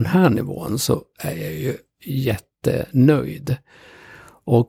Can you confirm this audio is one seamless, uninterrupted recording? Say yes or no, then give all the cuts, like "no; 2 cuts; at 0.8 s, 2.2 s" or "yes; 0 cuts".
yes; 0 cuts